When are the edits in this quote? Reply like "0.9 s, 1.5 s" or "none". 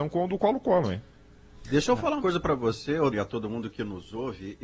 2.2 s, 3.1 s